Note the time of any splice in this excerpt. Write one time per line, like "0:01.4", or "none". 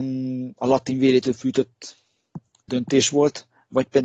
0:02.7